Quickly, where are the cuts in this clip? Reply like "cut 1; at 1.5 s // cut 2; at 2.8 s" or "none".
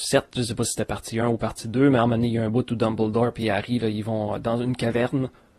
none